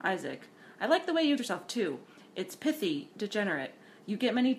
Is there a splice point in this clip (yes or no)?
yes